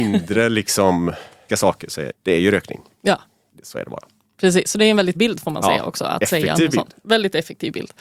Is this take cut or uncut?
cut